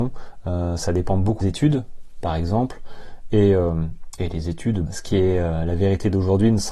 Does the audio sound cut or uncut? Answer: cut